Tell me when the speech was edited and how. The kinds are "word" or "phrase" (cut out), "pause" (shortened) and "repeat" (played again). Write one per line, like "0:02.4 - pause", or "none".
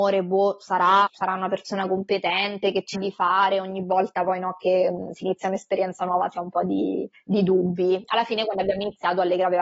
0:01.1 - word
0:02.9 - word
0:07.1 - pause

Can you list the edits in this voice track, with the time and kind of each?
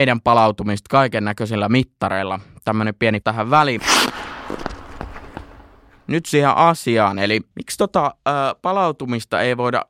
0:03.2 - word

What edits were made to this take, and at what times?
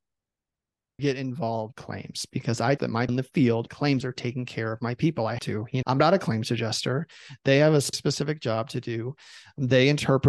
0:01.0 - word
0:01.7 - word
0:02.8 - word
0:03.1 - word
0:03.7 - word
0:04.0 - word
0:05.4 - word
0:05.8 - word
0:07.9 - word

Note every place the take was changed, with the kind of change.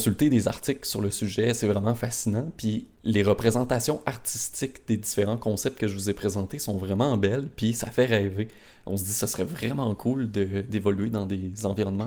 none

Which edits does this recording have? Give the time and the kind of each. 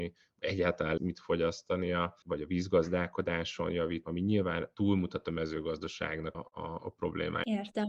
0:01.0 - word
0:02.2 - word
0:04.0 - word
0:06.3 - word

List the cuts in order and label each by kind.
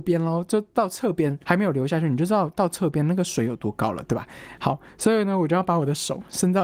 0:01.4 - pause

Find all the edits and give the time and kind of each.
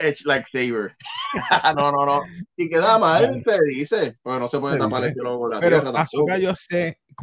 none

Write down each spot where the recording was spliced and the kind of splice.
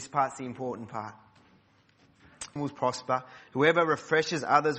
0:02.6 - phrase

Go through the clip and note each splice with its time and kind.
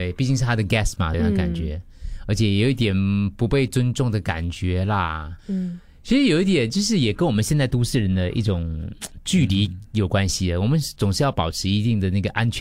0:01.1 - word
0:05.4 - pause

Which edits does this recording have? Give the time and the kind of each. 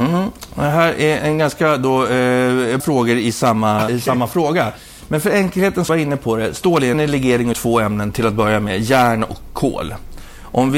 0:01.2 - word
0:02.8 - word
0:03.9 - word
0:05.9 - phrase
0:06.9 - phrase
0:07.5 - word

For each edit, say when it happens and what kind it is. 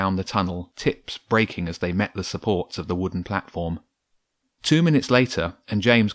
none

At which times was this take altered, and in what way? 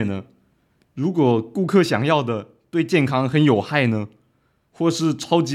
none

